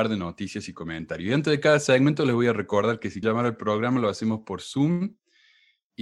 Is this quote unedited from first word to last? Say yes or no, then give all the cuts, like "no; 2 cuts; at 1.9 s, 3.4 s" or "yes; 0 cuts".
no; 1 cut; at 3.2 s